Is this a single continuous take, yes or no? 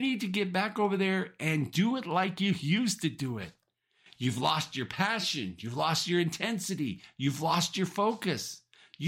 yes